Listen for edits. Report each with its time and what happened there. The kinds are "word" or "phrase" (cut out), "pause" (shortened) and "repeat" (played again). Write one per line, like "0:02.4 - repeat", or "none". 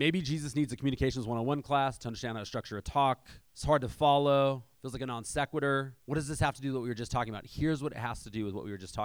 0:03.5 - pause
0:06.0 - pause